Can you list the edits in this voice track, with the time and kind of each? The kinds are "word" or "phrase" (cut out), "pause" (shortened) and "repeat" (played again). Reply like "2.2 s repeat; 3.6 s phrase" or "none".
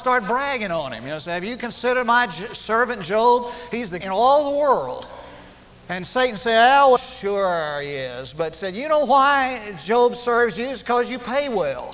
4.0 s phrase; 5.7 s pause; 7.0 s word